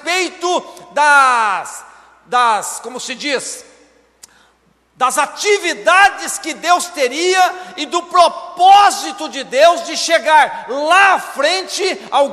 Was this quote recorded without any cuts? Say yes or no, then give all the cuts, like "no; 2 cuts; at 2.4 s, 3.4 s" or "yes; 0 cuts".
yes; 0 cuts